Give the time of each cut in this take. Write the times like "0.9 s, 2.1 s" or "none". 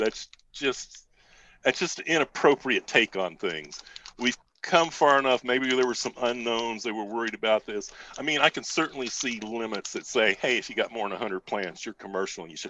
none